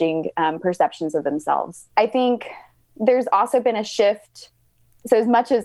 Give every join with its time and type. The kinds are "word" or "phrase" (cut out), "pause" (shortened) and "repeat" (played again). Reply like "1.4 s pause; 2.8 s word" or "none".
1.9 s pause